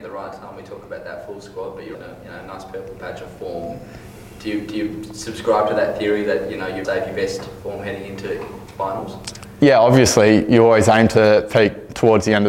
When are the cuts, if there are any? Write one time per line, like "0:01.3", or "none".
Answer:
0:01.9
0:06.8